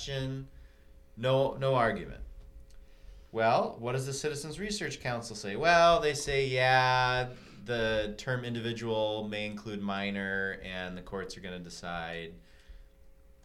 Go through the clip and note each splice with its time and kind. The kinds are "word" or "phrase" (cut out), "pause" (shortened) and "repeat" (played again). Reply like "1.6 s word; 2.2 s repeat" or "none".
none